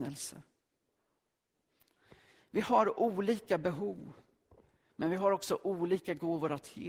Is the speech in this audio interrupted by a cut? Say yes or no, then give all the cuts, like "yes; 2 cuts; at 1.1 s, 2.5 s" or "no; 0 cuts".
no; 0 cuts